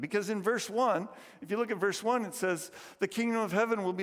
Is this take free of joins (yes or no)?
yes